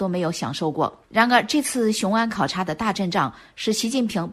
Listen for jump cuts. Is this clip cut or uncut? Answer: cut